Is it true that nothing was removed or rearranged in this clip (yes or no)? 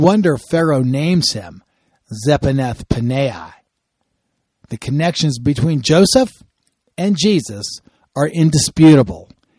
yes